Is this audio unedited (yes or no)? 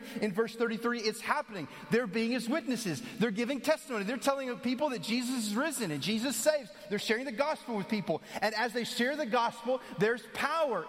yes